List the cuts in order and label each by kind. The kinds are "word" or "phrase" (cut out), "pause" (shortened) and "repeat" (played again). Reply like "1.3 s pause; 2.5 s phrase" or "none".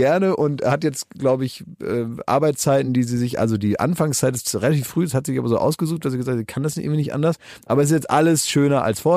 none